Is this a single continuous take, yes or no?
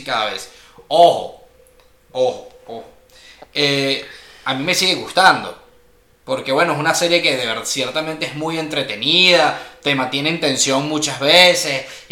yes